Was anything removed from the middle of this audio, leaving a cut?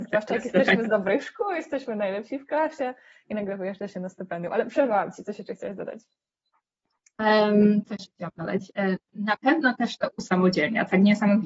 no; 0 cuts

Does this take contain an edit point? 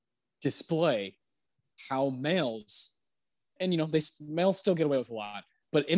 yes; 1 cut; at 3.6 s

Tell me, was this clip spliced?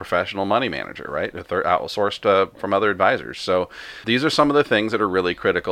yes; 2 cuts; at 2.5 s, 4.0 s

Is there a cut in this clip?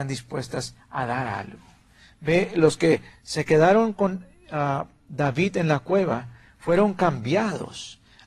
no; 0 cuts

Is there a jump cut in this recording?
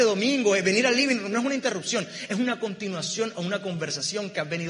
no; 0 cuts

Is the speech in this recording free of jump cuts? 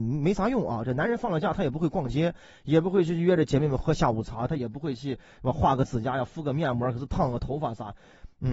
yes; 0 cuts

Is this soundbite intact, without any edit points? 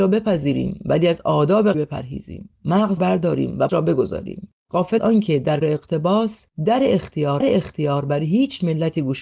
no; 6 cuts; at 1.7 s, 3.0 s, 3.7 s, 5.0 s, 5.6 s, 7.4 s

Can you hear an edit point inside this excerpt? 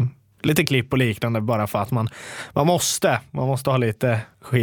no; 0 cuts

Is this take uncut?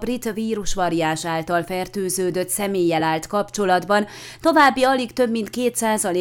yes; 0 cuts

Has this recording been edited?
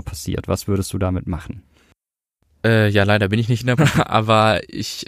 yes; 1 cut; at 3.8 s

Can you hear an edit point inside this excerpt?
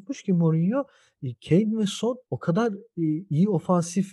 yes; 1 cut; at 2.2 s

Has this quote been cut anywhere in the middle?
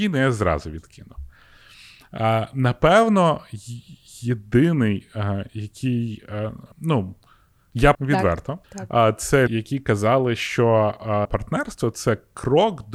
yes; 5 cuts; at 6.7 s, 7.9 s, 8.6 s, 9.5 s, 11.2 s

